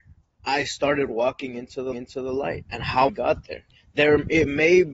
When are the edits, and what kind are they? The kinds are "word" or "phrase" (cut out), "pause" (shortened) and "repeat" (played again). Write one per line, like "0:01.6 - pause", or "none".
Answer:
0:01.9 - repeat
0:03.1 - word
0:03.7 - pause